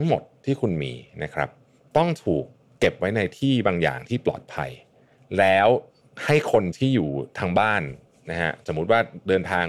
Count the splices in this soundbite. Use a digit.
0